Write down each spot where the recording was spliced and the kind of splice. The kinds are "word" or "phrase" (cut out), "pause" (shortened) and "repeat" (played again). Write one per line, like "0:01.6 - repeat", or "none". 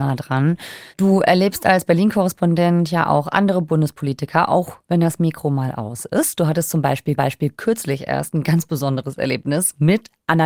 0:00.9 - pause
0:07.2 - repeat